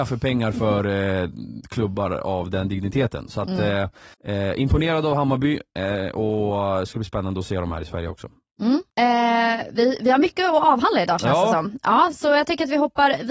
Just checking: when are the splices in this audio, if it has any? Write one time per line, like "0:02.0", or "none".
0:04.1
0:08.9